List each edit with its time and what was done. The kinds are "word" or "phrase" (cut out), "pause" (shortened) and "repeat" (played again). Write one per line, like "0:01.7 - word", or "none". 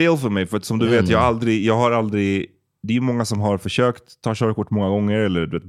none